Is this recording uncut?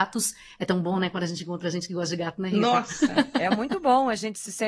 yes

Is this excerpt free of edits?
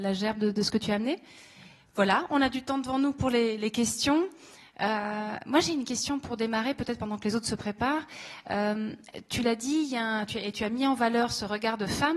yes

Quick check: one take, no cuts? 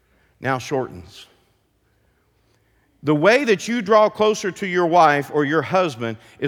yes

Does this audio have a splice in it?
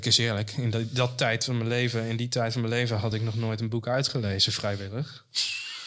no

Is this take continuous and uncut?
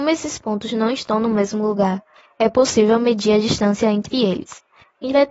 yes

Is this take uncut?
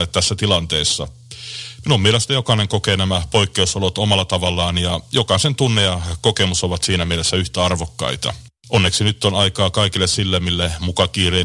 no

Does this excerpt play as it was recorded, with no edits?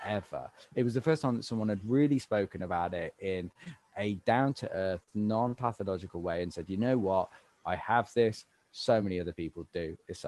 yes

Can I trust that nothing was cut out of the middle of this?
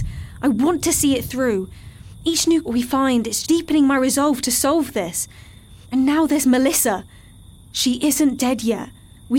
no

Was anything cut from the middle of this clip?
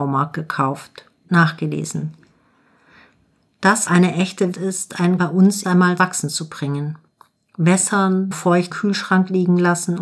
yes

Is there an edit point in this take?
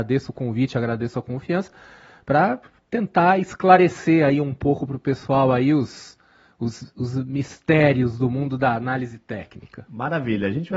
no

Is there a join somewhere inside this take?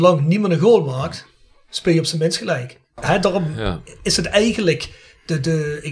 no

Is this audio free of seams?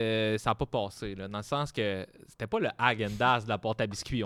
yes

